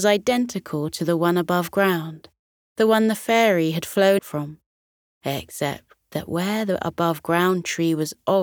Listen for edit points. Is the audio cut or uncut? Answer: cut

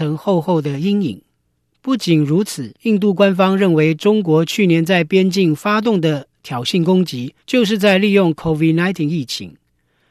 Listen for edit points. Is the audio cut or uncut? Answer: cut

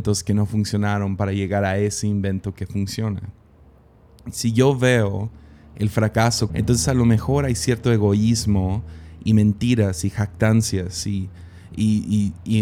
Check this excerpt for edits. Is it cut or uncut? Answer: cut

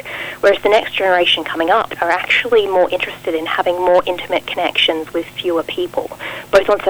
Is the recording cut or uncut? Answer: cut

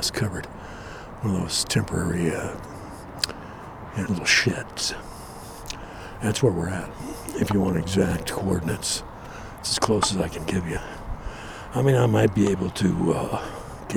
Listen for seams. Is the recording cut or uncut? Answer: cut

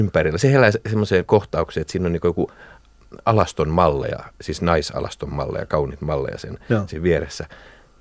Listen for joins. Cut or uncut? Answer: uncut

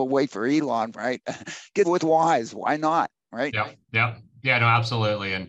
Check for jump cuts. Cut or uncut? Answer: cut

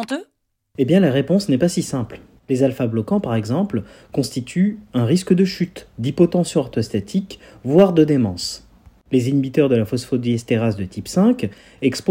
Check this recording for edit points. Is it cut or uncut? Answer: uncut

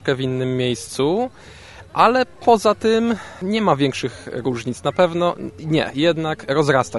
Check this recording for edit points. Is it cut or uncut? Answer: uncut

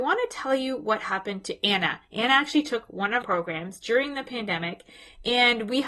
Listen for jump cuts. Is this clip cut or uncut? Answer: cut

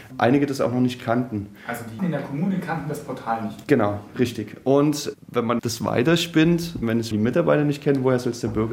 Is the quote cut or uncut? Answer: cut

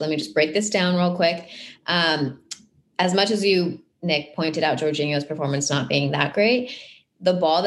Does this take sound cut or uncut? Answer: uncut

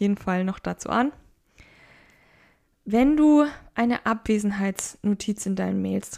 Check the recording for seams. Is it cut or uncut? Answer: uncut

